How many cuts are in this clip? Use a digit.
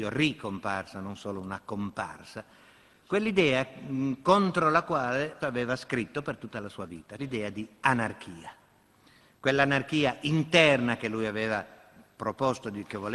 2